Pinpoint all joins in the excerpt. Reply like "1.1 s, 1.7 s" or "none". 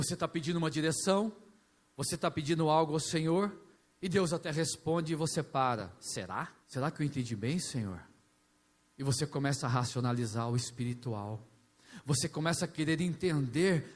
6.6 s